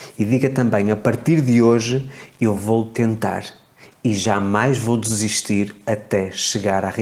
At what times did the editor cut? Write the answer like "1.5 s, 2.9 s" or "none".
none